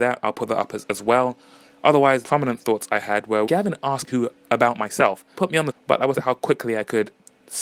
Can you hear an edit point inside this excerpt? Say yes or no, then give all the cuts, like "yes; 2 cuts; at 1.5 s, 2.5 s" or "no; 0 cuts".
yes; 6 cuts; at 2.2 s, 3.5 s, 4.1 s, 5.3 s, 5.7 s, 6.1 s